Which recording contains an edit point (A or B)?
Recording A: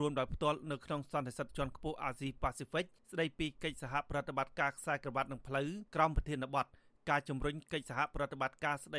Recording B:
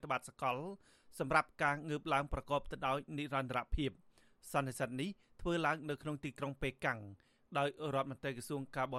A